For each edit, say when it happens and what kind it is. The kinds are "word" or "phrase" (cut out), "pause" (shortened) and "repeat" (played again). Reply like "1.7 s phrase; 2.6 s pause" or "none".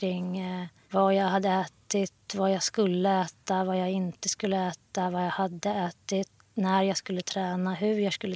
none